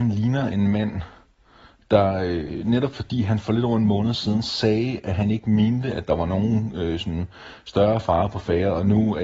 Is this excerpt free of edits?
yes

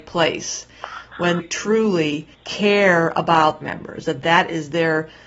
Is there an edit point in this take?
yes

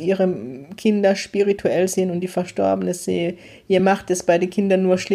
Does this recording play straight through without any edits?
yes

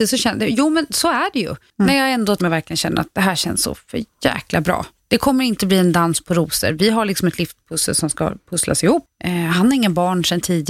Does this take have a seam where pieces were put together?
yes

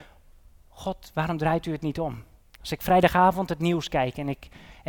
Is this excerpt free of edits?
no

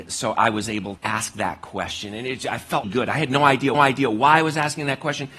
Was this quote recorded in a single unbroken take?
no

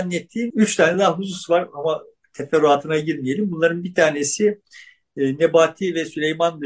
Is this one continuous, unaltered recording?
yes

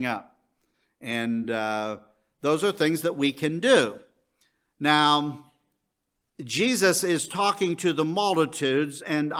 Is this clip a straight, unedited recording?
yes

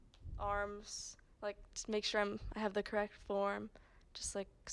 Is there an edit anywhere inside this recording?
no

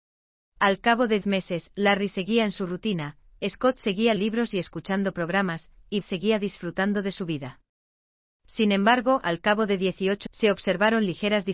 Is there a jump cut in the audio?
yes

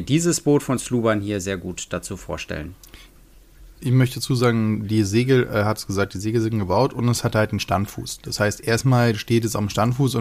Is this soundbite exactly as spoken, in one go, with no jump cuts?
yes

